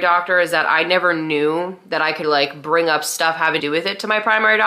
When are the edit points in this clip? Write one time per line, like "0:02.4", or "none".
0:02.2
0:03.6